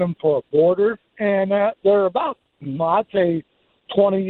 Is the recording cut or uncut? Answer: cut